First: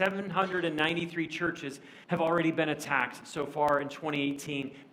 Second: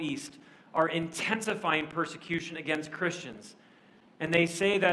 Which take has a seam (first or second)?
first